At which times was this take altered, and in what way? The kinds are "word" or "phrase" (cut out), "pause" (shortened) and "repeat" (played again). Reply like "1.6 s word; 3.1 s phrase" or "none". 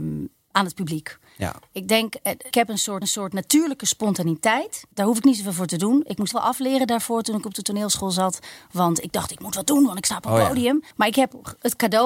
2.5 s word; 3.0 s repeat; 4.9 s pause; 6.3 s word; 10.9 s pause

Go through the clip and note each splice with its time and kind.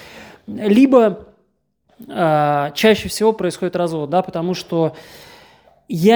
none

